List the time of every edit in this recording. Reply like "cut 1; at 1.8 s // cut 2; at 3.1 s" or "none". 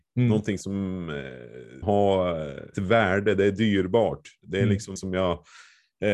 cut 1; at 1.8 s // cut 2; at 2.7 s // cut 3; at 5.0 s